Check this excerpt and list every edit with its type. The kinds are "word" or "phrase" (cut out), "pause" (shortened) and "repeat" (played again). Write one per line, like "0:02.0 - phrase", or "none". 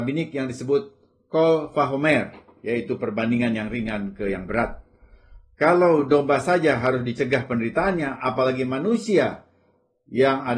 none